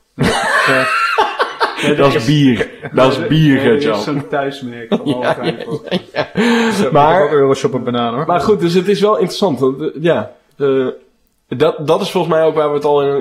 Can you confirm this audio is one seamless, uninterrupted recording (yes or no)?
yes